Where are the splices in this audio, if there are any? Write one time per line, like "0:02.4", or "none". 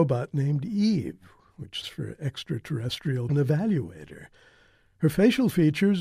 0:01.8
0:03.3